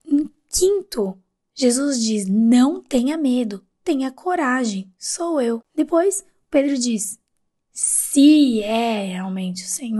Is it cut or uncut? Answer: uncut